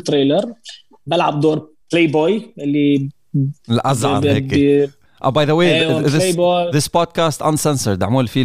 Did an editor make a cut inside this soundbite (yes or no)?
yes